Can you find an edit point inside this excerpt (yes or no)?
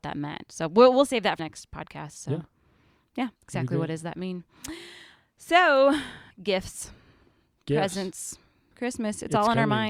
yes